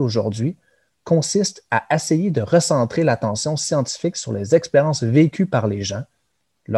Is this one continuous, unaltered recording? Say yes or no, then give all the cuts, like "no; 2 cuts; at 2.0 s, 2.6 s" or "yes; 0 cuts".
yes; 0 cuts